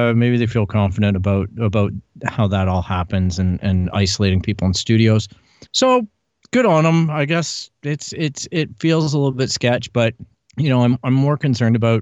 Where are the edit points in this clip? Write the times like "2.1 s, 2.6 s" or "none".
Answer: 5.7 s, 10.3 s

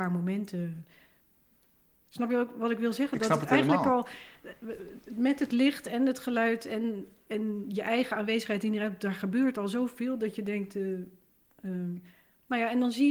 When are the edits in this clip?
none

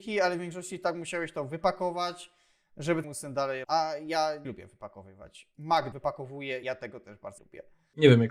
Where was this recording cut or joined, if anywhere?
3.0 s, 3.6 s, 4.4 s, 5.9 s, 6.6 s, 7.4 s

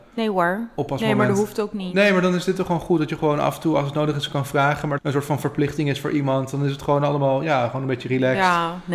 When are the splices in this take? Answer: 5.0 s

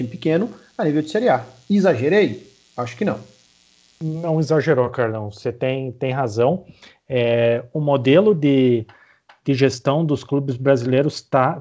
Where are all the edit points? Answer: none

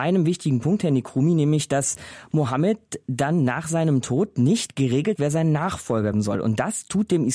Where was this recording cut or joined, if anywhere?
5.1 s, 6.1 s

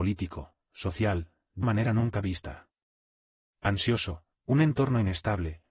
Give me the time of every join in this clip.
1.6 s, 4.4 s

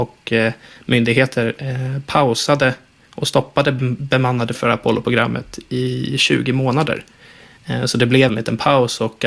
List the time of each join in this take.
4.5 s, 8.3 s

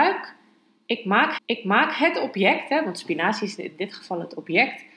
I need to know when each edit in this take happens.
1.4 s

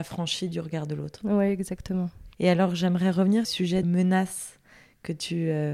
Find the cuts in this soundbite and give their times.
2.3 s, 3.4 s, 3.8 s

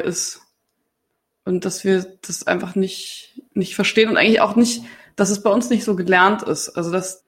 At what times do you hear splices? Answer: none

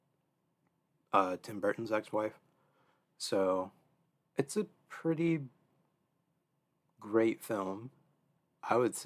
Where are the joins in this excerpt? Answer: 4.1 s

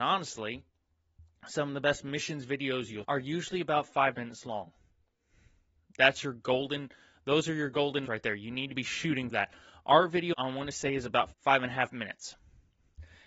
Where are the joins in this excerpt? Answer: 3.0 s, 4.1 s, 8.1 s, 9.3 s, 10.3 s, 11.3 s

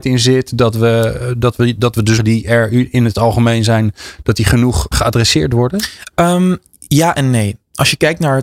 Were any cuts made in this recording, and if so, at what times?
2.2 s, 4.9 s

